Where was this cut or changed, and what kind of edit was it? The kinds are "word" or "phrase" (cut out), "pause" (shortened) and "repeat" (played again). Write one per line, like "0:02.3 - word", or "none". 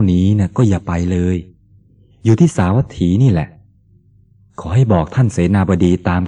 none

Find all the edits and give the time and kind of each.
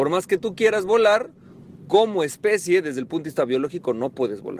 none

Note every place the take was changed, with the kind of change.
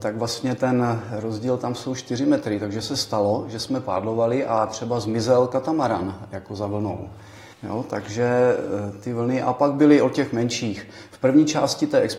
0:07.5 - pause

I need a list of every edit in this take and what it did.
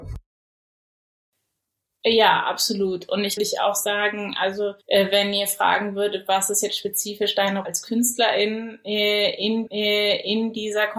0:03.4 - phrase
0:04.8 - pause
0:07.6 - word
0:09.7 - repeat

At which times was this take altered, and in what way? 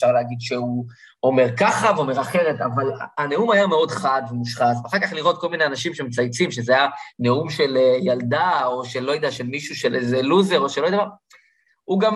none

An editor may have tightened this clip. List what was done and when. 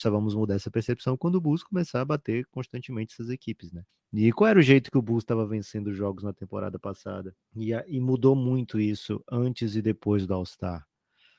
0:03.9 - pause
0:07.4 - pause

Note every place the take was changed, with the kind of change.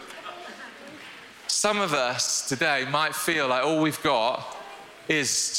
none

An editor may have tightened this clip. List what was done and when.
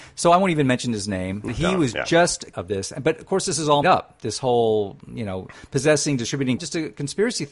0:01.5 - word
0:02.5 - word
0:03.8 - word
0:06.6 - phrase

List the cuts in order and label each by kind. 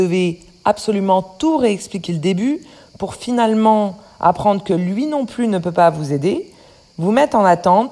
0:02.1 - word

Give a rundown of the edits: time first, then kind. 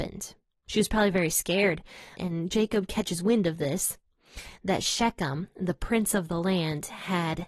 none

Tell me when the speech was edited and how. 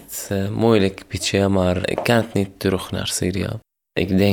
0:01.8 - word

